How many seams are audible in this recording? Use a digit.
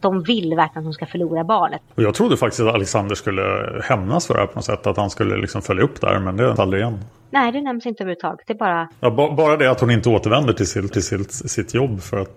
3